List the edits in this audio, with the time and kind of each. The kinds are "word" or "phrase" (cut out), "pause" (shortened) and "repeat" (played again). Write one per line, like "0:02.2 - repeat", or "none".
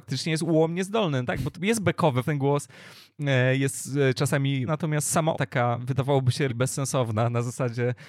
0:01.5 - word
0:02.2 - word
0:04.7 - word
0:05.3 - word
0:06.5 - word